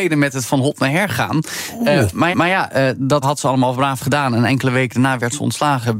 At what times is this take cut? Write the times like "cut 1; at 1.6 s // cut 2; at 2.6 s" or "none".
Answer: cut 1; at 2.3 s // cut 2; at 3.2 s

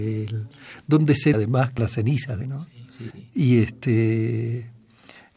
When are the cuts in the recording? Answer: cut 1; at 1.3 s // cut 2; at 1.8 s // cut 3; at 2.4 s // cut 4; at 3.1 s

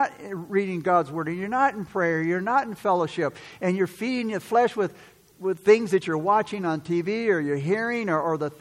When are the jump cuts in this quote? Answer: none

